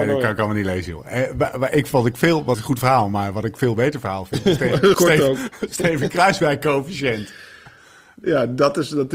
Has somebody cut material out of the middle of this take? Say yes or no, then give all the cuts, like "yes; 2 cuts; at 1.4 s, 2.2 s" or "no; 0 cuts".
yes; 2 cuts; at 2.5 s, 4.9 s